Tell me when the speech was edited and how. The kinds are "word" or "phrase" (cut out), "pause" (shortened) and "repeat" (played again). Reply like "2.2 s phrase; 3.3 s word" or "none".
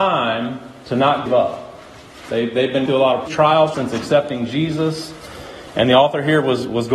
1.3 s word; 2.9 s word; 3.3 s word; 3.7 s word